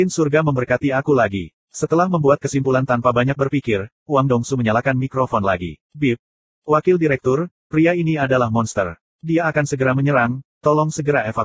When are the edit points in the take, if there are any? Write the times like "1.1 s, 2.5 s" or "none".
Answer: 1.6 s, 5.8 s